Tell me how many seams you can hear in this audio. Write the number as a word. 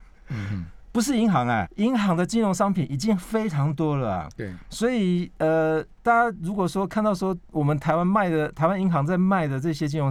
one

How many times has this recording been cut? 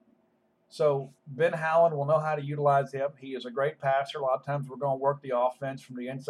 one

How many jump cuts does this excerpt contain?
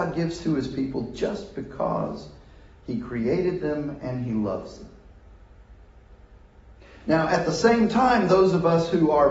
zero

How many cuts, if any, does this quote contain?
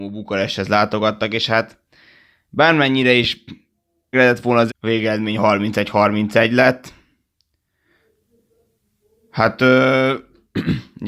two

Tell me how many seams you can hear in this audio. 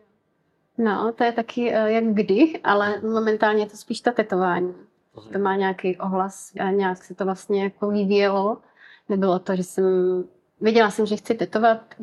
one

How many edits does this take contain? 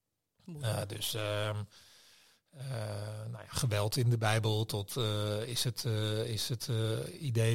zero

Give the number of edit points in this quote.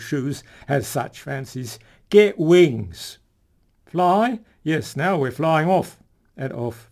zero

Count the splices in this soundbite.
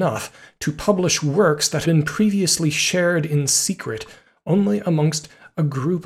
one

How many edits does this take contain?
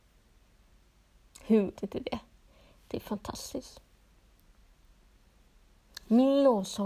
one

